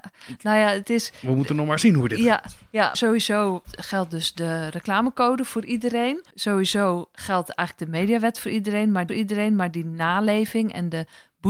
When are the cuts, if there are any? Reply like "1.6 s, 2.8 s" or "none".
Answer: 2.9 s, 3.6 s, 6.3 s, 9.1 s